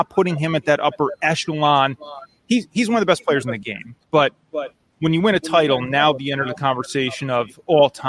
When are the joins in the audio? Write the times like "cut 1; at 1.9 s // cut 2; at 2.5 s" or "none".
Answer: cut 1; at 4.0 s